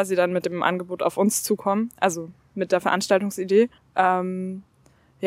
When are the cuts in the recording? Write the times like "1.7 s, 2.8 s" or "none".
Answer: 3.8 s